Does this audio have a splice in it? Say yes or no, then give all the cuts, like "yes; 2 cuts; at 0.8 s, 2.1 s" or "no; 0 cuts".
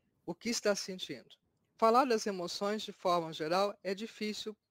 no; 0 cuts